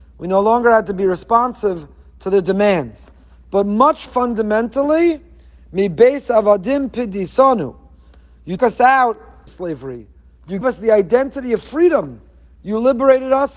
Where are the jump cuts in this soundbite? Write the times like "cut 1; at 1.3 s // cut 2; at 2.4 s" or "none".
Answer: cut 1; at 4.1 s // cut 2; at 8.6 s // cut 3; at 9.5 s // cut 4; at 10.6 s